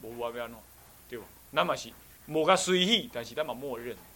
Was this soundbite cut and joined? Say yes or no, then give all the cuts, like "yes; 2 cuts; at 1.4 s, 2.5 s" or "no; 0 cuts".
yes; 1 cut; at 2.1 s